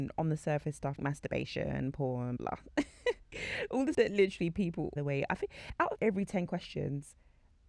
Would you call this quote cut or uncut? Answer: cut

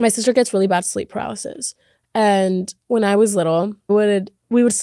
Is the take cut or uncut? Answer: cut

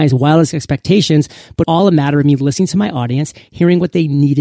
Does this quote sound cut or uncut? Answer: cut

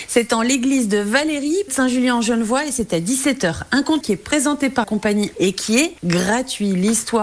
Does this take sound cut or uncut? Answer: cut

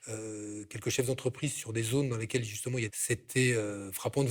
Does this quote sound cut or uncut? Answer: cut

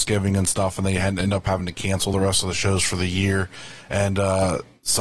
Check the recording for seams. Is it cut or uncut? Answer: uncut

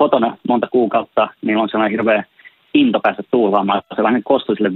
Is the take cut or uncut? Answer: uncut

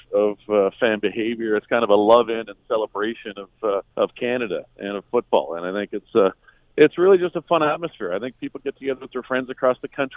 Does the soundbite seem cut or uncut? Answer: cut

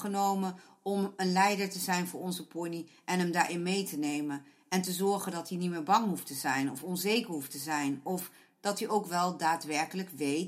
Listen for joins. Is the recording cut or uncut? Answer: uncut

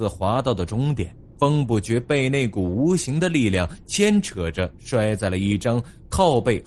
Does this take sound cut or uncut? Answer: cut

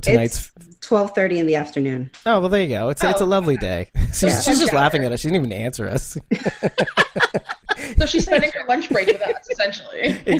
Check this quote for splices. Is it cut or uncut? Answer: uncut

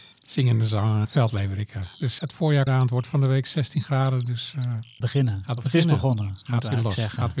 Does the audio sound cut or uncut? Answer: cut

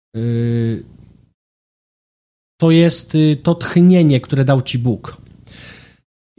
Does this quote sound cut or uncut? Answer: uncut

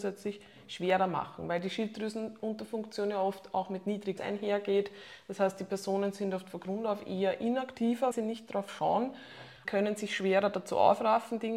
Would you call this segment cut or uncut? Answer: cut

